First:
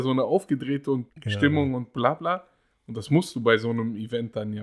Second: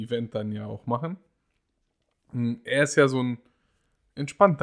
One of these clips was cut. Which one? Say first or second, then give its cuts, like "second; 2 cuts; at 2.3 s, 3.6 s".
first; 1 cut; at 1.1 s